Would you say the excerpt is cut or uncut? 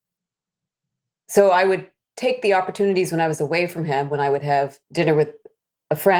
cut